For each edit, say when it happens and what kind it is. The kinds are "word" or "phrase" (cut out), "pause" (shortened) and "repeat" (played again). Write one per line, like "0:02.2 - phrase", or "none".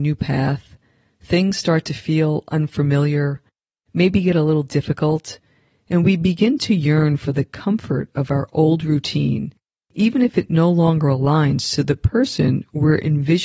none